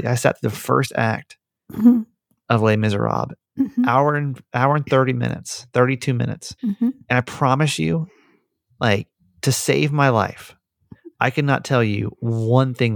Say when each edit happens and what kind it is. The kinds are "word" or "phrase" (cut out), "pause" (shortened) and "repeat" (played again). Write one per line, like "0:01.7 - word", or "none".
0:06.6 - pause